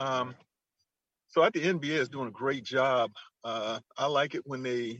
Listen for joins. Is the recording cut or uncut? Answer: cut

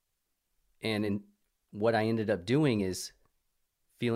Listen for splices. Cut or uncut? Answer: uncut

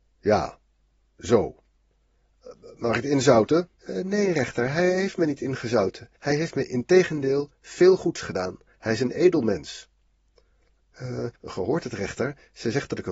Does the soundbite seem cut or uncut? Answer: cut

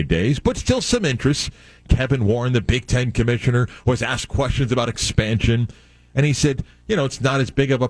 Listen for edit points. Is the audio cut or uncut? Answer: uncut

